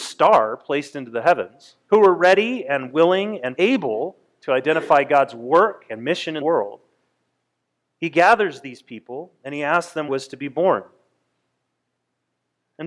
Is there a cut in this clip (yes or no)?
yes